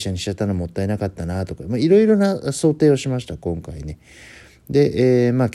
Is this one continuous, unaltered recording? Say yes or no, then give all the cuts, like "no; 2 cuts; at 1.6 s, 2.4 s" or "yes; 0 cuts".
yes; 0 cuts